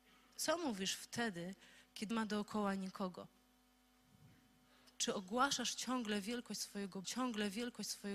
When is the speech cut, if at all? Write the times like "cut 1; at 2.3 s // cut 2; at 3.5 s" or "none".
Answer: cut 1; at 2.1 s // cut 2; at 7.0 s